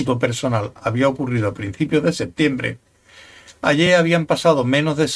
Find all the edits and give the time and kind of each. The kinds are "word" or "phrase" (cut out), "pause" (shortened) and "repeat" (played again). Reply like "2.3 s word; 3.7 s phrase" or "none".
none